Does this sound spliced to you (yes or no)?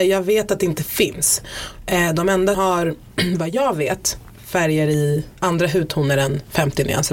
yes